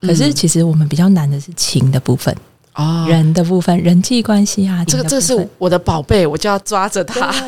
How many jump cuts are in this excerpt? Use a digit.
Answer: 1